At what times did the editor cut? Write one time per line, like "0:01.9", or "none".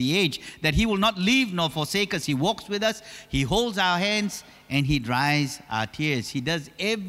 none